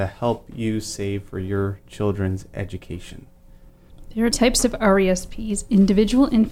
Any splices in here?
yes; 1 cut; at 4.3 s

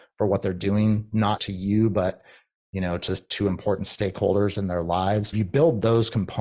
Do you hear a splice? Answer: yes; 2 cuts; at 1.4 s, 5.3 s

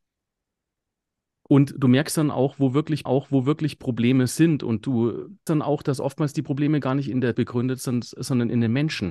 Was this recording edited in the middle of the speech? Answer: yes; 3 cuts; at 3.1 s, 5.5 s, 7.3 s

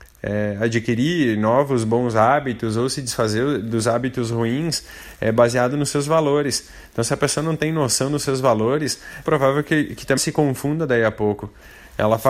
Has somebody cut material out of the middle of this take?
yes; 2 cuts; at 9.3 s, 10.2 s

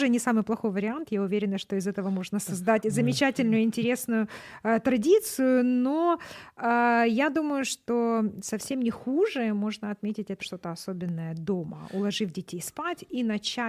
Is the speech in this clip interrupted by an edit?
yes; 1 cut; at 10.4 s

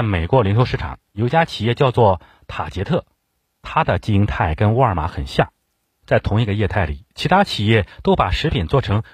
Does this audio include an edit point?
no; 0 cuts

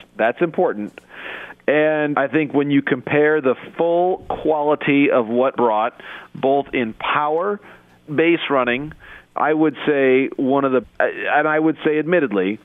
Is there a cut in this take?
yes; 5 cuts; at 2.1 s, 5.6 s, 8.1 s, 9.4 s, 10.8 s

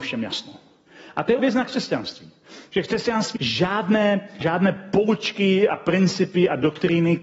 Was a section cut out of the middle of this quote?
yes; 3 cuts; at 1.4 s, 3.4 s, 4.4 s

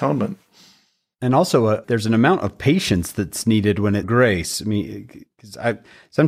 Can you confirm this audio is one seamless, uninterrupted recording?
no; 2 cuts; at 1.8 s, 4.0 s

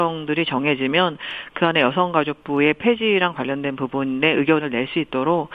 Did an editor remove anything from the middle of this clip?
no; 0 cuts

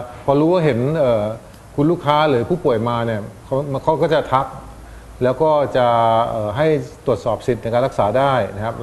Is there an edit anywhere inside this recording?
no; 0 cuts

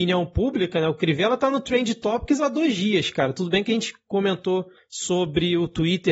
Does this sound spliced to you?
no; 0 cuts

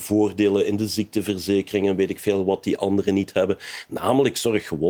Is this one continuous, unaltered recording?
yes; 0 cuts

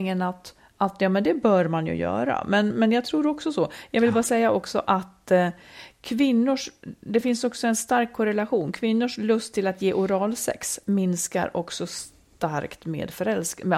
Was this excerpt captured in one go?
yes; 0 cuts

